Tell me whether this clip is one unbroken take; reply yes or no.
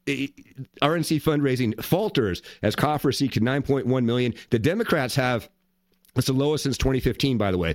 yes